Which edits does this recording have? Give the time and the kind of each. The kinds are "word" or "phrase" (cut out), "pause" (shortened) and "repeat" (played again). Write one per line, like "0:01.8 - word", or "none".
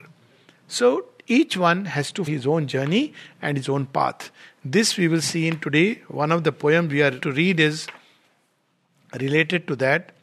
0:02.3 - word
0:07.2 - word